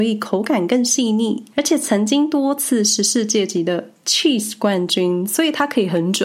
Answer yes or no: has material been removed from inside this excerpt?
yes